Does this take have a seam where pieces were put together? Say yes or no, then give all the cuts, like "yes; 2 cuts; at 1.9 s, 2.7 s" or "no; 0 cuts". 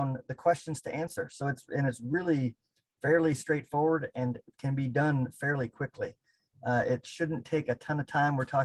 no; 0 cuts